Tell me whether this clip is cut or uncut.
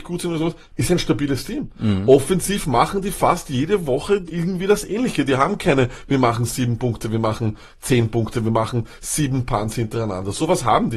cut